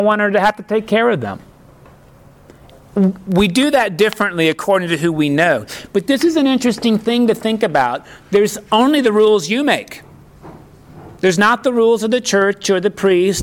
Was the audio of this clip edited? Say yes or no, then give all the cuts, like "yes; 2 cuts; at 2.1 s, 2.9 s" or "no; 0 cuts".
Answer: yes; 2 cuts; at 8.7 s, 11.1 s